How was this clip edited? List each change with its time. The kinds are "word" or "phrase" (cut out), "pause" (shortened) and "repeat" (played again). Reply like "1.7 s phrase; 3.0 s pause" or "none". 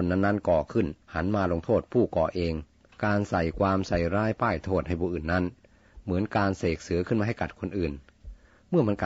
1.0 s pause; 2.9 s pause

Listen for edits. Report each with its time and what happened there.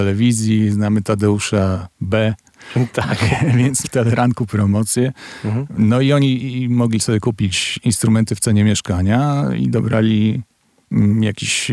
3.8 s word

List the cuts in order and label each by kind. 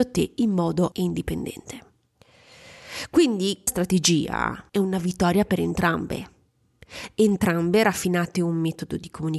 0.9 s word; 3.7 s word; 4.7 s pause

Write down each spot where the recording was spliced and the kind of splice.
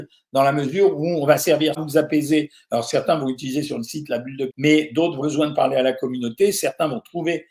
1.7 s word; 4.5 s word; 5.2 s word

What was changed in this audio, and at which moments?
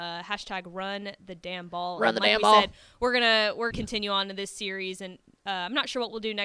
3.7 s word

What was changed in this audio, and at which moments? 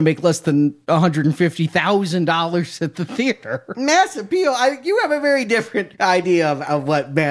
none

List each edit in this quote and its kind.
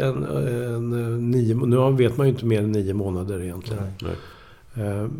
none

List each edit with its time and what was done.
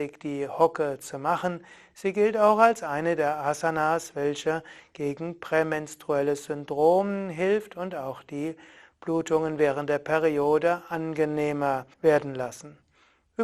11.9 s pause

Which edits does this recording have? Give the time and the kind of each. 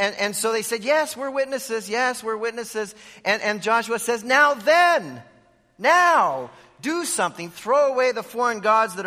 none

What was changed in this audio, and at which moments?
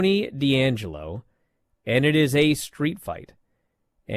none

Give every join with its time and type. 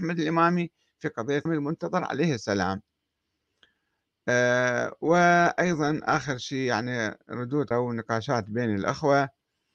1.5 s word; 7.7 s word

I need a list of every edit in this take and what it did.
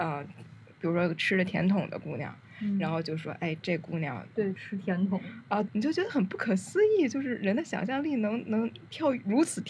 4.5 s phrase; 5.7 s word

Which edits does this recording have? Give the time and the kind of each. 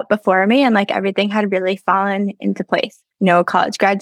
3.1 s pause

